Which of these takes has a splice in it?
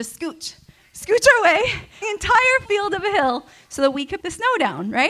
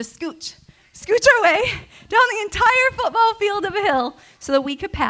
first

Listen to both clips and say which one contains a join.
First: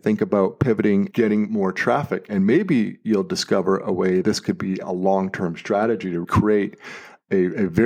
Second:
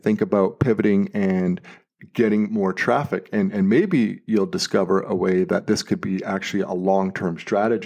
first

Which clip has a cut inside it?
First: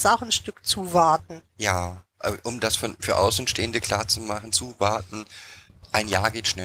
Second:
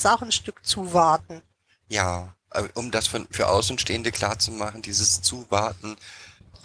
first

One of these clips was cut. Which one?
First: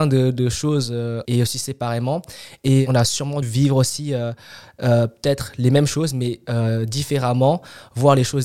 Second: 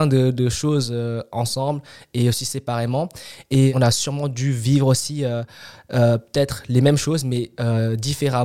first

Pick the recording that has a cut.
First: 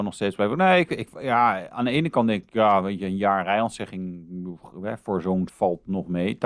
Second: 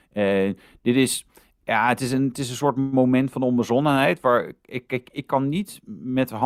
first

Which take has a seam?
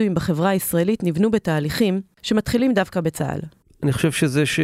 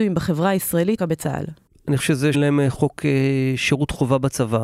second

